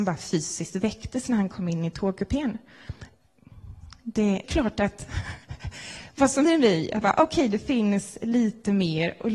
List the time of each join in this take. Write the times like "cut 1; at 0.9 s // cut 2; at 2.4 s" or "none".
cut 1; at 4.4 s // cut 2; at 5.4 s // cut 3; at 6.4 s // cut 4; at 7.0 s